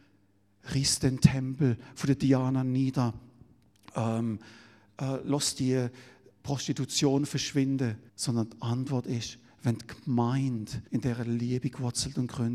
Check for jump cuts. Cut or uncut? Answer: cut